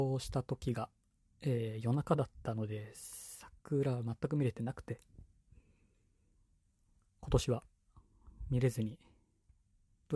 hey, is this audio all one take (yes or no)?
yes